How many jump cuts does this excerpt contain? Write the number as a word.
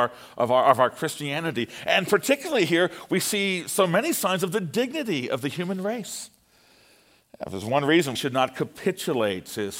one